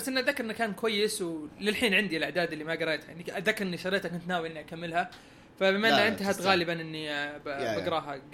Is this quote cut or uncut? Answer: uncut